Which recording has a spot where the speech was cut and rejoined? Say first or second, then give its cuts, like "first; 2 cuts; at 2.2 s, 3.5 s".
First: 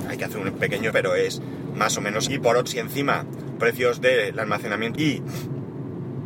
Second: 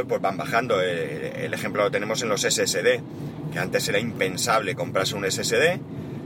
first; 5 cuts; at 0.9 s, 2.3 s, 2.7 s, 3.6 s, 5.0 s